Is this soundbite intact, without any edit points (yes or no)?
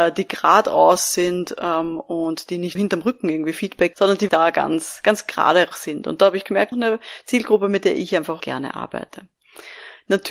no